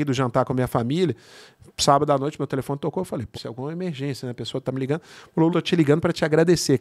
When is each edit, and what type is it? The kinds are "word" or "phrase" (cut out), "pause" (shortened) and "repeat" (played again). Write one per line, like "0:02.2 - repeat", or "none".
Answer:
0:03.3 - word
0:05.5 - word

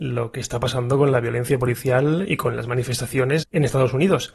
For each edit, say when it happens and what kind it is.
0:03.4 - word

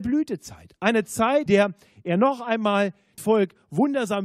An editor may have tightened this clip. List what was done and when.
0:01.5 - word
0:03.2 - word

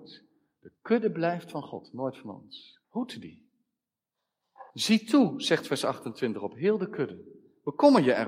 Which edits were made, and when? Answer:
0:02.8 - pause
0:04.7 - pause

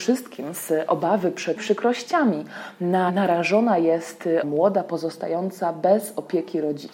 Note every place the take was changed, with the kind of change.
0:01.6 - word
0:03.1 - word
0:04.4 - word

